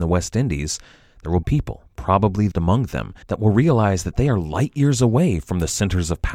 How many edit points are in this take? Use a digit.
4